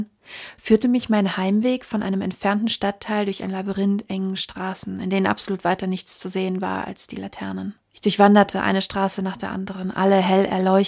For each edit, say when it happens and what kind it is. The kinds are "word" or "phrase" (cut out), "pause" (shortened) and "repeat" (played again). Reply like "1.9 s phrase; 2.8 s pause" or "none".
7.8 s pause